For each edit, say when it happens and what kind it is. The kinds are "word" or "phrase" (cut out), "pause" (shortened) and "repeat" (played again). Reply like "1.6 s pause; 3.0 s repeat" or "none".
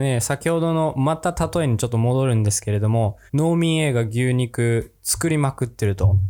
3.3 s pause